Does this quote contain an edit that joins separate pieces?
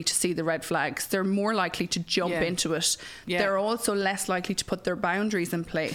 no; 0 cuts

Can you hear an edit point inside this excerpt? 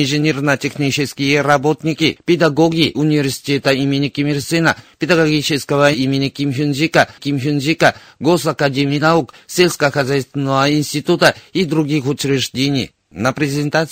yes; 3 cuts; at 2.9 s, 5.9 s, 7.2 s

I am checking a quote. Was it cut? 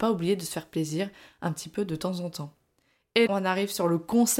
yes; 1 cut; at 3.3 s

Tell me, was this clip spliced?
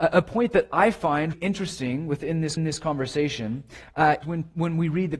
yes; 3 cuts; at 1.3 s, 2.6 s, 4.2 s

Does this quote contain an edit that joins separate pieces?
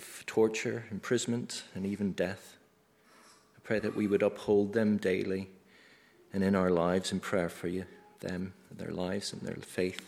no; 0 cuts

